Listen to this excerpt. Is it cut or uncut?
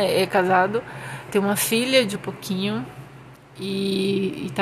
cut